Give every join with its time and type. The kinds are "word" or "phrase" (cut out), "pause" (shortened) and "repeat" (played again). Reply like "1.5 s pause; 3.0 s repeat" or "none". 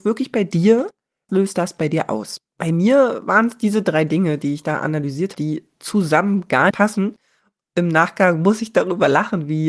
1.3 s word; 2.5 s pause; 5.3 s word; 5.7 s pause; 6.7 s word